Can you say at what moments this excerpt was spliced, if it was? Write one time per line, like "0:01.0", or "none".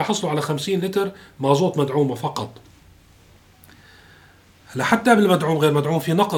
none